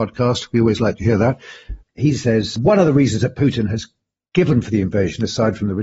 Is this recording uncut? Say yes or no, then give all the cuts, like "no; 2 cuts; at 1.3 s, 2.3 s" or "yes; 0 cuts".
yes; 0 cuts